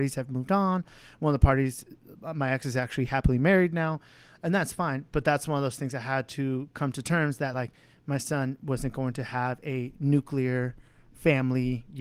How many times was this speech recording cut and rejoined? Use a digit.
0